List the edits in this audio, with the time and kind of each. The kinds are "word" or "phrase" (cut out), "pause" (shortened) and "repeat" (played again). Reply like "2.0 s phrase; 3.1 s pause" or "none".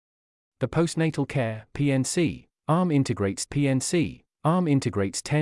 3.5 s repeat